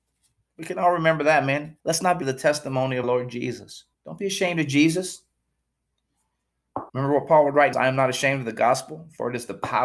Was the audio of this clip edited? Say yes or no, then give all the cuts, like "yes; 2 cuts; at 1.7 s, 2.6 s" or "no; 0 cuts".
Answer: yes; 6 cuts; at 1.8 s, 2.2 s, 3.0 s, 3.9 s, 6.9 s, 7.7 s